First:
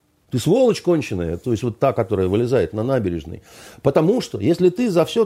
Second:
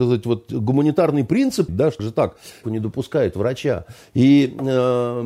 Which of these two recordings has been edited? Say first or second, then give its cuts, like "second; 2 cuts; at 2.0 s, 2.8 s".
second; 3 cuts; at 1.7 s, 2.0 s, 2.6 s